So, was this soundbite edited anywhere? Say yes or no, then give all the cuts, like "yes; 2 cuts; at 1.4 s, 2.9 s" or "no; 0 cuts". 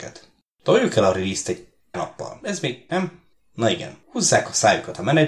yes; 3 cuts; at 1.9 s, 2.9 s, 4.0 s